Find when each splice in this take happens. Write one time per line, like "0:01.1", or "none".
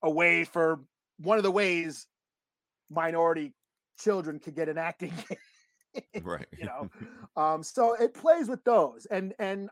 none